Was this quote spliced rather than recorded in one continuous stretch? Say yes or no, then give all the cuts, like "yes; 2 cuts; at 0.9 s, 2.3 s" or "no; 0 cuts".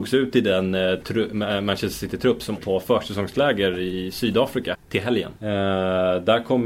yes; 3 cuts; at 2.6 s, 4.7 s, 5.4 s